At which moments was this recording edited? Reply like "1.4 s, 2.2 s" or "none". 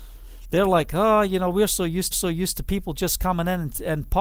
2.1 s